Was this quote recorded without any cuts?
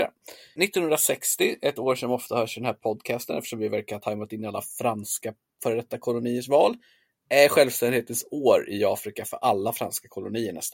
yes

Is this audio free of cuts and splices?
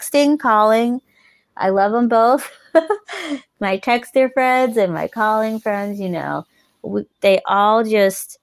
yes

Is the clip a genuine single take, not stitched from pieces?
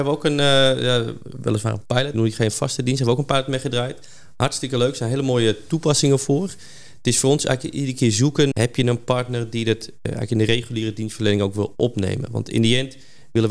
no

